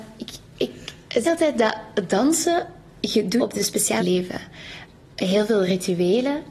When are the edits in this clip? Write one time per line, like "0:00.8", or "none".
0:01.2
0:03.4
0:04.0